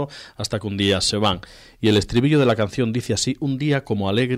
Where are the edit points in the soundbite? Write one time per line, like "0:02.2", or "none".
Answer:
none

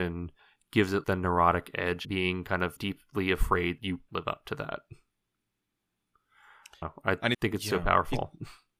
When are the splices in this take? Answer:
0:01.0
0:02.0
0:02.8
0:03.8
0:04.1
0:06.8
0:07.3

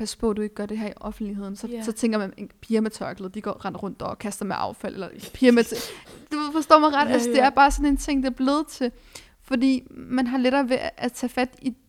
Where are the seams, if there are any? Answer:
none

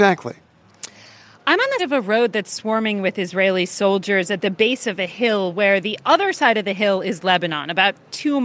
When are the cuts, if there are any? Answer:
0:01.8

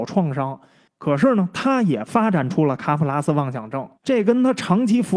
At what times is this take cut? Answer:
0:03.9

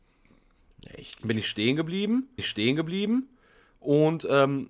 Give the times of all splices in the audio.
0:02.4

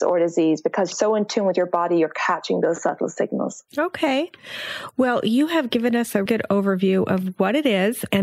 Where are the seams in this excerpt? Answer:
0:00.9
0:03.7
0:06.3

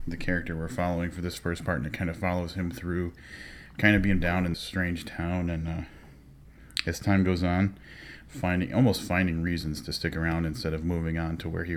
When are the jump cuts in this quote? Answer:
0:04.2
0:04.5

